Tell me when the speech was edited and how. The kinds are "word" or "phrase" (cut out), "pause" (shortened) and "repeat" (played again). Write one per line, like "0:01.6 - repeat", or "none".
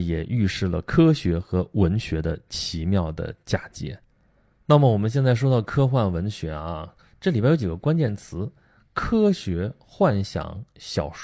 none